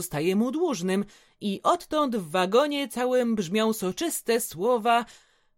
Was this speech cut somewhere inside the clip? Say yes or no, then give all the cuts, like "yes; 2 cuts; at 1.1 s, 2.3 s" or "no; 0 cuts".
no; 0 cuts